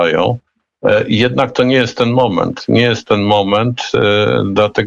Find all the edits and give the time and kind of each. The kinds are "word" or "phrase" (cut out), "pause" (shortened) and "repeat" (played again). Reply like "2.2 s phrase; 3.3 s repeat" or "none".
none